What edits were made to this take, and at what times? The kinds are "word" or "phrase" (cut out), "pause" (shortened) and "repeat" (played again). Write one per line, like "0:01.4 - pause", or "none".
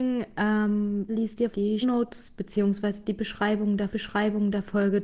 0:01.1 - word
0:01.5 - word
0:01.8 - word
0:03.9 - repeat